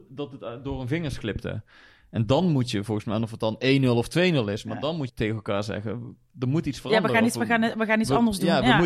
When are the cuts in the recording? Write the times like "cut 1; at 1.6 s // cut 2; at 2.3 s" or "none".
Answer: cut 1; at 5.1 s